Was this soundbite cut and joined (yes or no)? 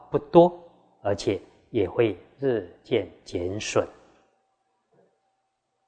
no